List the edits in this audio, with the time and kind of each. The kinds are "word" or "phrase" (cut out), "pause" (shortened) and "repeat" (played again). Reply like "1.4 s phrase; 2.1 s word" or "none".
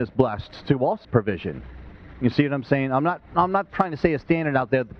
1.0 s word